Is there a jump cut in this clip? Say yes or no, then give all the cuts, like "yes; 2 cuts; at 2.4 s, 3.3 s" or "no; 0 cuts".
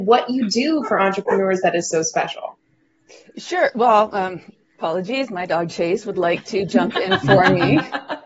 no; 0 cuts